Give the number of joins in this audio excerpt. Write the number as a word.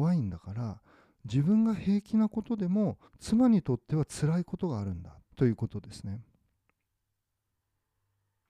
two